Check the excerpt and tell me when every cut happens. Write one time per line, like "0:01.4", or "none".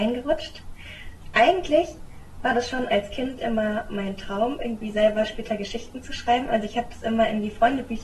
none